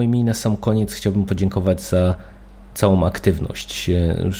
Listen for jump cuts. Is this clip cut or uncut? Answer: uncut